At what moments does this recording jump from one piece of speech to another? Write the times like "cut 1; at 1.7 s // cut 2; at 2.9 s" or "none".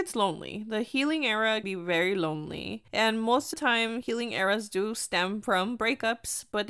cut 1; at 1.6 s // cut 2; at 2.9 s // cut 3; at 3.5 s